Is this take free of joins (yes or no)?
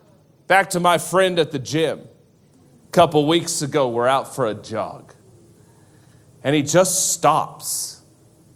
yes